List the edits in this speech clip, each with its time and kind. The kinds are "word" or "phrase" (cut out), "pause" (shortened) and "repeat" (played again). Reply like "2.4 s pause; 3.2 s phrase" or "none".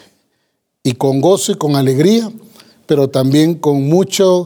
none